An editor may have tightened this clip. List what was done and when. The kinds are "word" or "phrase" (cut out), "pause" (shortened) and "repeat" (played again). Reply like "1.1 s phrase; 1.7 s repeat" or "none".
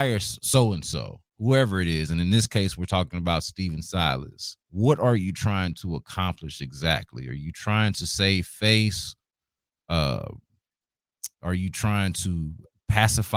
1.3 s pause; 4.6 s pause; 11.3 s pause